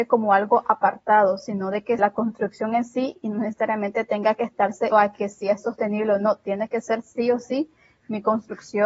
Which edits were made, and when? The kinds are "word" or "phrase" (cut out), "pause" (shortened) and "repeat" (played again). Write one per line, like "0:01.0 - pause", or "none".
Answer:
0:02.0 - phrase
0:04.9 - word

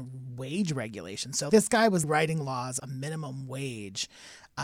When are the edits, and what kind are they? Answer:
0:01.5 - word
0:02.0 - word
0:02.8 - word

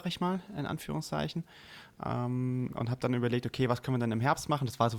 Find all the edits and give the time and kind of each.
none

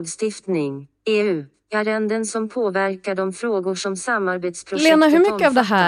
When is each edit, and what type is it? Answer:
none

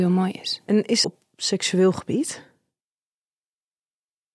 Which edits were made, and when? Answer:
0:01.0 - phrase

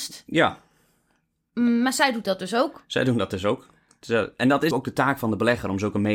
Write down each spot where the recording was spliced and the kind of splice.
0:04.7 - word

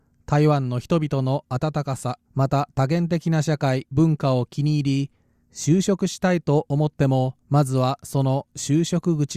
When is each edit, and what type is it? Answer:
0:02.3 - pause
0:07.4 - pause

